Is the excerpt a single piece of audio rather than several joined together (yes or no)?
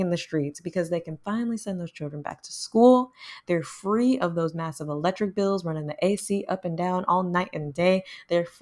yes